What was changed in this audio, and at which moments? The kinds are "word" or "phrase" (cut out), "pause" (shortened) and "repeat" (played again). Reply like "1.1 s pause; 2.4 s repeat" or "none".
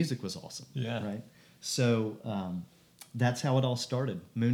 none

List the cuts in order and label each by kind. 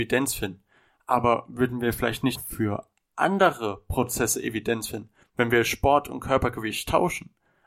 2.4 s word

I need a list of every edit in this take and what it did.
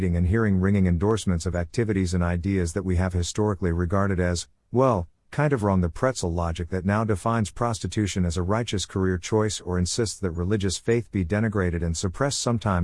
none

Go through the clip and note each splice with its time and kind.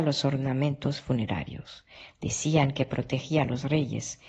none

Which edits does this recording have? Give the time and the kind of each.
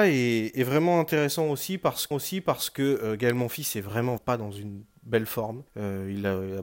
2.1 s repeat; 4.2 s word; 5.7 s pause

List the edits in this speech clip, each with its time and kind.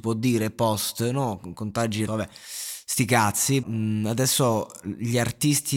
2.1 s word; 3.6 s word

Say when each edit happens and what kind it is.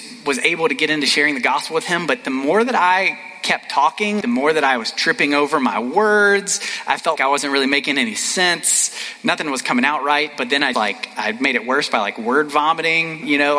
4.2 s word; 7.2 s word; 10.7 s word

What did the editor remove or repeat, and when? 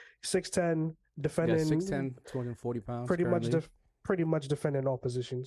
none

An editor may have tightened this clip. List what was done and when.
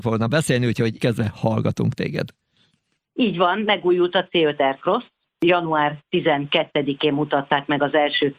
1.0 s word

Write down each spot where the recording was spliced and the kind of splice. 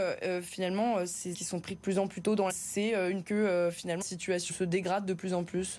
1.3 s word; 2.5 s word; 3.2 s word; 4.0 s word; 4.5 s word

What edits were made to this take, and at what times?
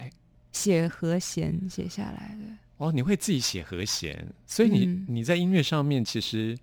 none

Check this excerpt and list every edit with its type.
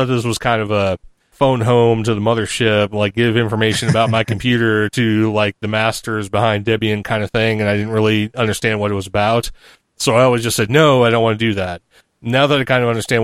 none

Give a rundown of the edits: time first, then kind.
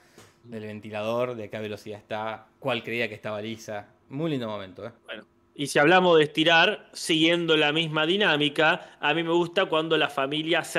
5.0 s pause

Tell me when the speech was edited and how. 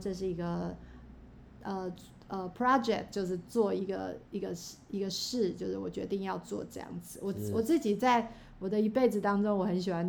none

